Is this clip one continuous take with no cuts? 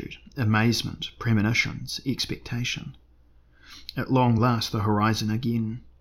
yes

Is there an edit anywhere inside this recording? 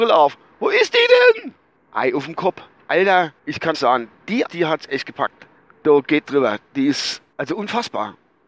yes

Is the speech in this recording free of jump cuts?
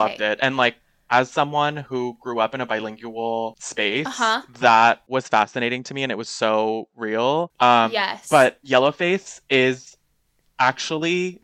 yes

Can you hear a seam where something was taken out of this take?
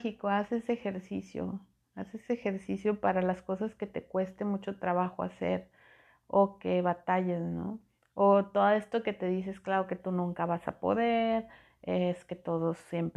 no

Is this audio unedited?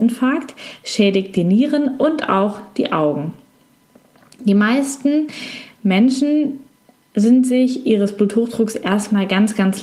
yes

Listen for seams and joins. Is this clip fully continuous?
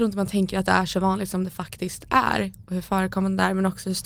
yes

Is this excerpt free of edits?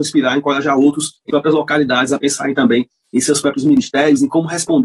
no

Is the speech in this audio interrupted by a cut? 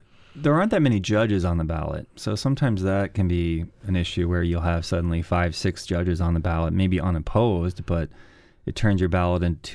no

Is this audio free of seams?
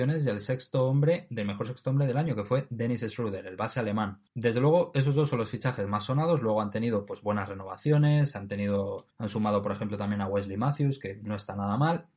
no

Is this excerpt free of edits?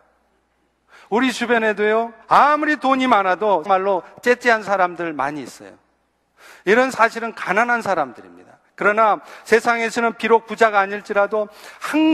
no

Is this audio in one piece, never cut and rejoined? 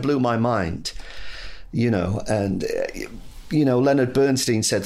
yes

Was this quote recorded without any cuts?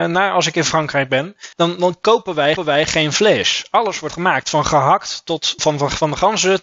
no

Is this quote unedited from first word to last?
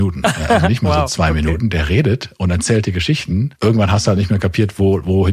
yes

